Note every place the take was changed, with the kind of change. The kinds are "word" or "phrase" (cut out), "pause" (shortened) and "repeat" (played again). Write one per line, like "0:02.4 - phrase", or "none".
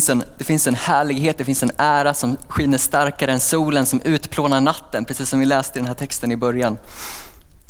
none